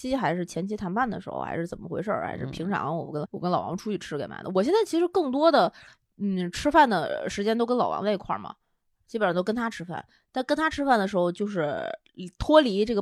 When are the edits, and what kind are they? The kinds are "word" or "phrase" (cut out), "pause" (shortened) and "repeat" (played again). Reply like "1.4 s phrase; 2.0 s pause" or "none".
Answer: 3.3 s word